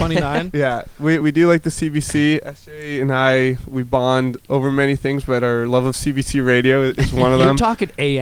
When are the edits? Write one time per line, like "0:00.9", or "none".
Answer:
0:01.2